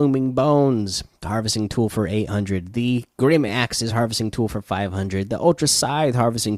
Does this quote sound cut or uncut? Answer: uncut